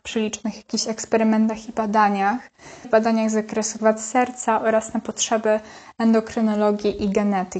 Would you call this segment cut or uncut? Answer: cut